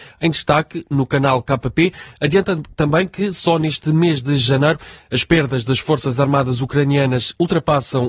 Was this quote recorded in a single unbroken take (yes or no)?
yes